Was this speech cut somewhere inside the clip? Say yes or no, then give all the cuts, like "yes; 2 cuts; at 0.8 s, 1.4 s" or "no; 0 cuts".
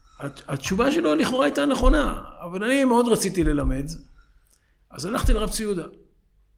no; 0 cuts